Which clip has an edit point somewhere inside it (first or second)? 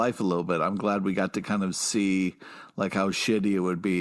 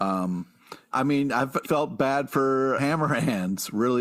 second